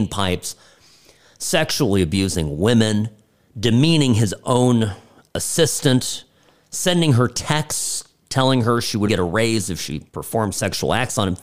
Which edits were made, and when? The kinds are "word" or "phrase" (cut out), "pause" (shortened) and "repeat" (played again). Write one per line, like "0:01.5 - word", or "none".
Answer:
0:09.1 - word
0:10.1 - pause

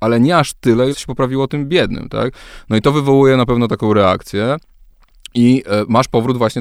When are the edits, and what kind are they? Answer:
0:00.9 - word

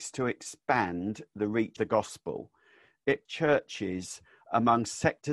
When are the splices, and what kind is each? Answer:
0:01.8 - word
0:03.3 - word

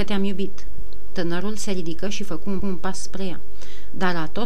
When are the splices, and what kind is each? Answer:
0:02.6 - repeat

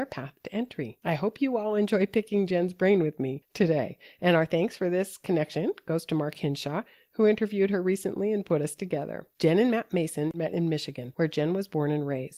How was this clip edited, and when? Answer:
none

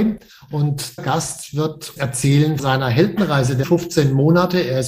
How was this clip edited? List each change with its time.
0:01.0 - word
0:02.0 - word
0:02.6 - word
0:03.6 - word

